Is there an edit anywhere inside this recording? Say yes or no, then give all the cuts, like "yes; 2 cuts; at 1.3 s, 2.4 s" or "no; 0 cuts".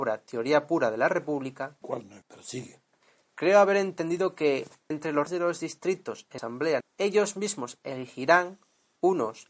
yes; 6 cuts; at 1.8 s, 2.2 s, 4.9 s, 5.3 s, 6.4 s, 6.8 s